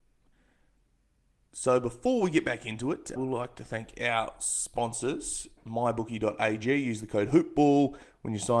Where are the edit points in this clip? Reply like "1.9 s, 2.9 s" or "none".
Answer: 3.2 s